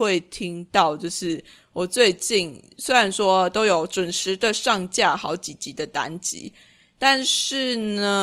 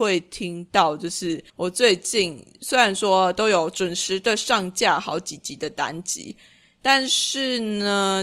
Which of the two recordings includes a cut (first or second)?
second